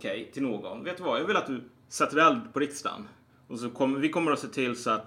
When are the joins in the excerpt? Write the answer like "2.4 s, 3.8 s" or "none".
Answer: none